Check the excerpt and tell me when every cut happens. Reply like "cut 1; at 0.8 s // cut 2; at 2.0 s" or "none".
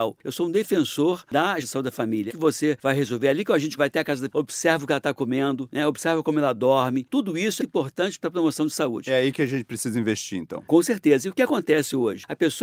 cut 1; at 1.6 s // cut 2; at 2.3 s // cut 3; at 3.8 s // cut 4; at 4.3 s // cut 5; at 7.6 s